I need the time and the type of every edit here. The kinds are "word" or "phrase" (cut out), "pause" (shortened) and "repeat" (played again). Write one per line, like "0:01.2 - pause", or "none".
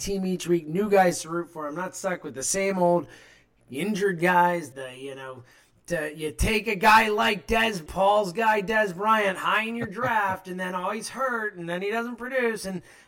0:04.7 - word
0:07.9 - word